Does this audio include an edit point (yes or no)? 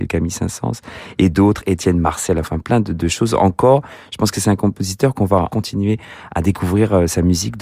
yes